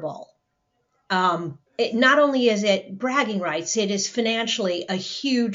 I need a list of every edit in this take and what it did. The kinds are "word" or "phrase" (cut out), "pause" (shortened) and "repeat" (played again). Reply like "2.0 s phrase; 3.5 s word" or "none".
1.7 s pause